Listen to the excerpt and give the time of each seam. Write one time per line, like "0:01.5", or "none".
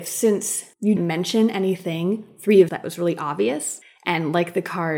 0:01.0
0:02.7